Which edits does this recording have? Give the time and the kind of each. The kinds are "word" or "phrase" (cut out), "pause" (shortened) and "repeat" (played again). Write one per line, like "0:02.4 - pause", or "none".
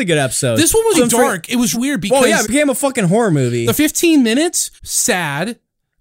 0:00.9 - word
0:01.7 - word
0:02.4 - word
0:03.7 - word
0:04.8 - pause